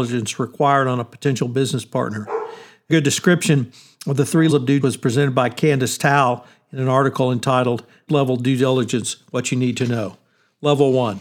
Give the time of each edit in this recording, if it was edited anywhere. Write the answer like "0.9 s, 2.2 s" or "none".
2.9 s, 4.5 s, 4.8 s, 8.1 s